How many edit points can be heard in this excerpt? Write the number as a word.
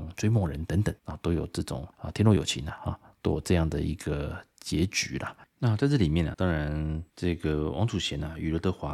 five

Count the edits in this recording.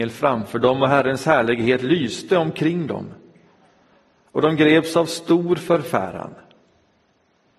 zero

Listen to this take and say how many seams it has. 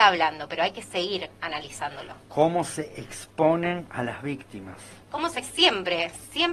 three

